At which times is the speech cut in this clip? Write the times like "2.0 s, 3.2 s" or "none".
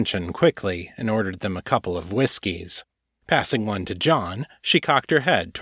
none